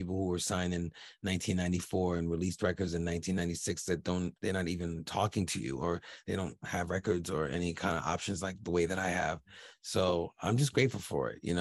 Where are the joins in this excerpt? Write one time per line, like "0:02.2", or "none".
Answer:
0:04.4